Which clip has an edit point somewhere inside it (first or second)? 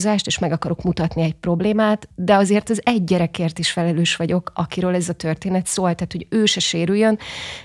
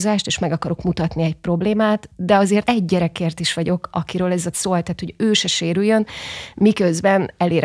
second